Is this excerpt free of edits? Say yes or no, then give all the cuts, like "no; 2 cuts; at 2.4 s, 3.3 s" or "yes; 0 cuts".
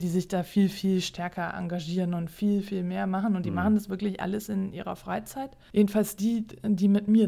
yes; 0 cuts